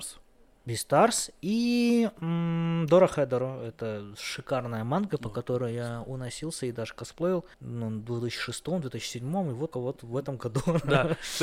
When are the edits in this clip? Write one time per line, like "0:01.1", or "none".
0:07.5
0:09.7